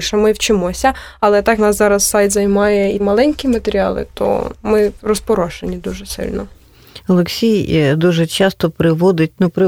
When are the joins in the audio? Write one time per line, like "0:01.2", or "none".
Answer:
0:01.6
0:03.0
0:04.5

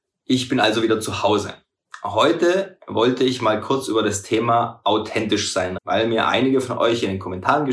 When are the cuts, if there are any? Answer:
0:05.8

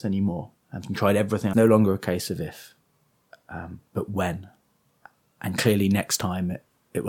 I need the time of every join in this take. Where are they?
0:01.5

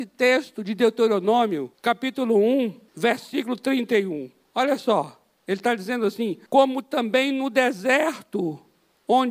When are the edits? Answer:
0:01.7
0:02.9
0:06.5

